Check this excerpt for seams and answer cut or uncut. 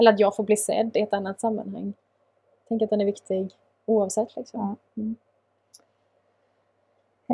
uncut